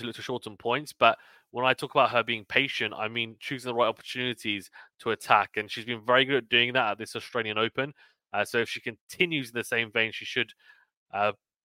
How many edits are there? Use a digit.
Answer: 0